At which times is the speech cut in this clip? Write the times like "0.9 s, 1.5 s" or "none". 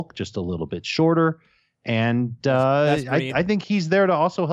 none